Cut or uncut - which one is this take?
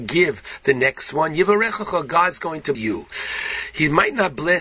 cut